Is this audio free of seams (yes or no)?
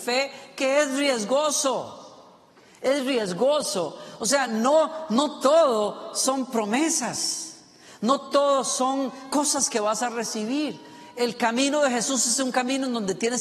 yes